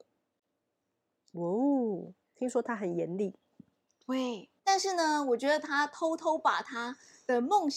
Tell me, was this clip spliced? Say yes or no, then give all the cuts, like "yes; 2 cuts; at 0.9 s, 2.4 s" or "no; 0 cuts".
yes; 2 cuts; at 2.2 s, 4.6 s